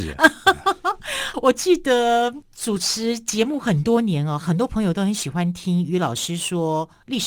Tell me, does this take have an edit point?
yes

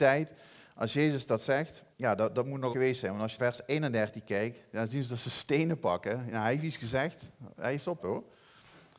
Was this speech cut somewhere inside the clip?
yes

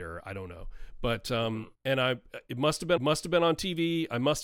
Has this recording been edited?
yes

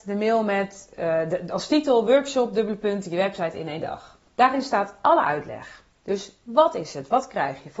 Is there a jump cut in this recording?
yes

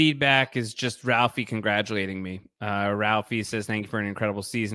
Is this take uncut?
yes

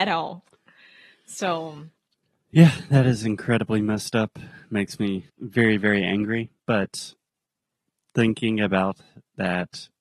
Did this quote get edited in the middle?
yes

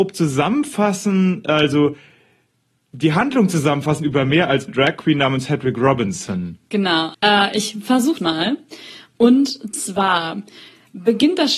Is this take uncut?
no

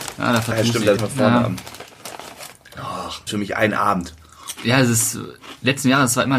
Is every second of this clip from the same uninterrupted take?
no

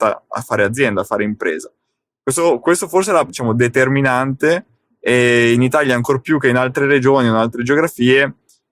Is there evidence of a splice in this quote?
yes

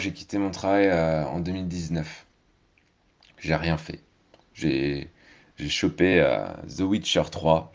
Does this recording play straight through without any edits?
yes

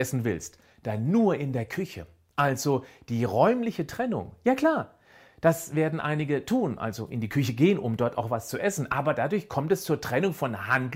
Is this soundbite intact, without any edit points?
yes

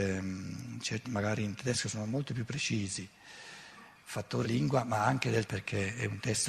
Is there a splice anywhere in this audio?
yes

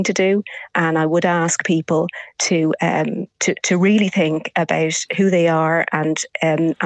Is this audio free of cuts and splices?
yes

